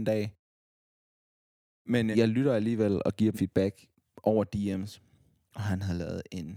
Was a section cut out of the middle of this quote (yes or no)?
yes